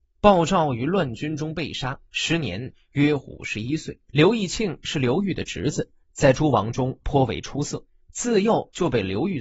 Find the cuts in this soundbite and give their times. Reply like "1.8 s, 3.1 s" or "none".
2.0 s, 4.0 s, 6.0 s, 8.0 s